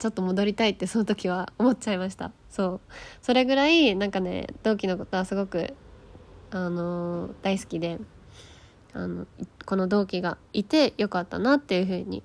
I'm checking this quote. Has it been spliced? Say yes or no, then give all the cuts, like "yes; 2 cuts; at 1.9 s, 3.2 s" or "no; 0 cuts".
yes; 2 cuts; at 9.5 s, 10.4 s